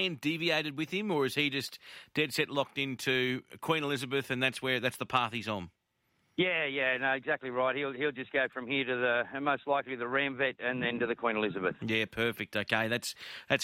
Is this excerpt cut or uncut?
uncut